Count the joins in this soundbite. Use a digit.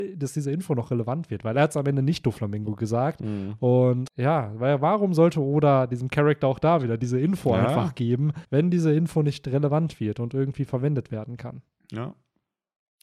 2